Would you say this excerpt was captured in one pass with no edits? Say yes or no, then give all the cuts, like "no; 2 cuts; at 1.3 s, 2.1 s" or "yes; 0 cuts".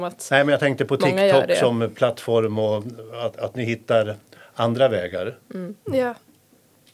yes; 0 cuts